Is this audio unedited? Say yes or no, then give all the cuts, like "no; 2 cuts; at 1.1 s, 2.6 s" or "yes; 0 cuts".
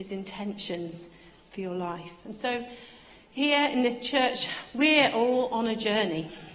yes; 0 cuts